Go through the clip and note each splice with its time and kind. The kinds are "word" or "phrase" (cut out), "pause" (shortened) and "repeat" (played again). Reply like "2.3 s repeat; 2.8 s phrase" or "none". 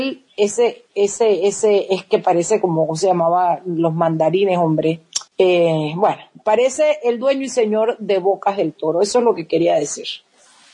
5.3 s pause